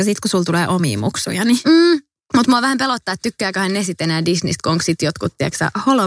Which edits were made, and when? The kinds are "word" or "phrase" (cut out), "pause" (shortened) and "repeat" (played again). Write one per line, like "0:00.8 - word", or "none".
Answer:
none